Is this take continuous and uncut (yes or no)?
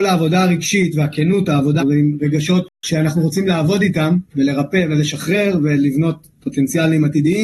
no